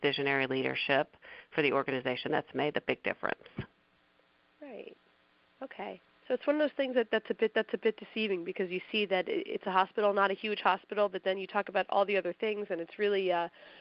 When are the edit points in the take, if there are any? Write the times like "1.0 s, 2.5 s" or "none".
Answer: 7.5 s